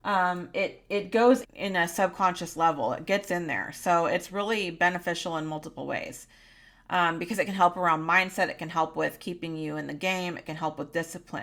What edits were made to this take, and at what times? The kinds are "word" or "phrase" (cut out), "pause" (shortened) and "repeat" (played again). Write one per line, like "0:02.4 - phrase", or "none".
0:01.4 - word